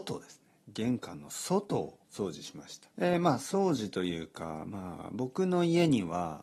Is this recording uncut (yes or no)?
no